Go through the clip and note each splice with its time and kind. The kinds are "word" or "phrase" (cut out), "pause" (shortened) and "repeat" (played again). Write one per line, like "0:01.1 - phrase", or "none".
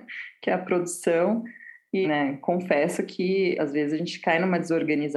0:02.0 - word